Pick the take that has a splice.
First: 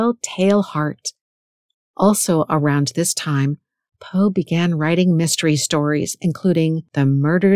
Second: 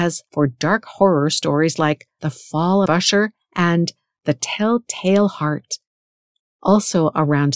second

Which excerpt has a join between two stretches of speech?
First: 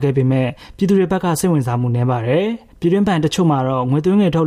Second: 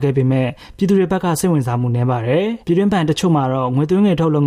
second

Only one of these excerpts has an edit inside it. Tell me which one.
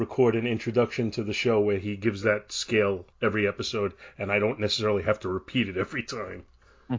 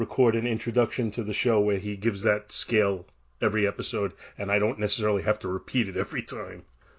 first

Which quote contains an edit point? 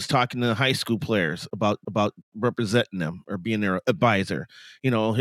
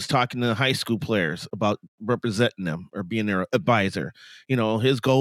first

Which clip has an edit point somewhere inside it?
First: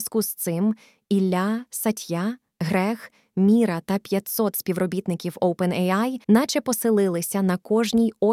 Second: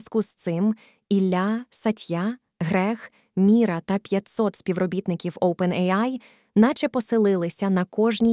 first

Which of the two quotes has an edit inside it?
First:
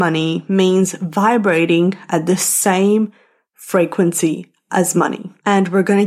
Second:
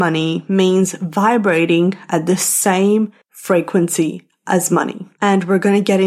second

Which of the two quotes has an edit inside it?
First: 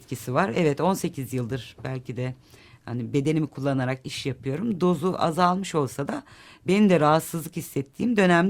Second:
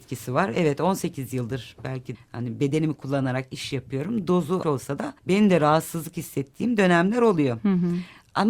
second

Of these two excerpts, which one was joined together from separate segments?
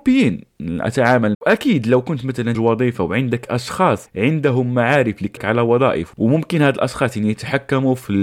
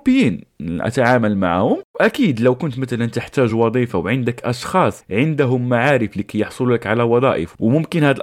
first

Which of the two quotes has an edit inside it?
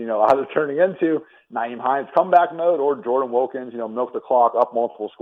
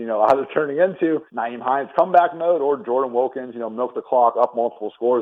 second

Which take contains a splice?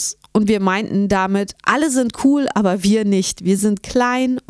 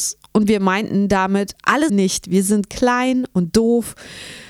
second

